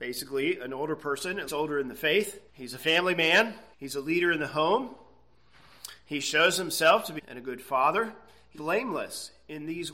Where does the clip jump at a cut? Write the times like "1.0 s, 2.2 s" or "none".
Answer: 1.5 s, 2.5 s, 3.7 s, 7.2 s, 8.5 s